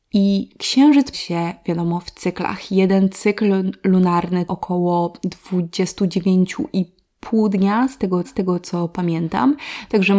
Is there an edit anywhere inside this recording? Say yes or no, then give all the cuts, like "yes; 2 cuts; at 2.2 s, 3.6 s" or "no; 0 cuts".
yes; 3 cuts; at 1.1 s, 4.5 s, 8.2 s